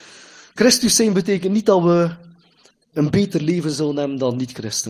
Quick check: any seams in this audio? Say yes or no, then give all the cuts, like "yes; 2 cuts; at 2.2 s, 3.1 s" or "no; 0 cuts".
yes; 1 cut; at 2.7 s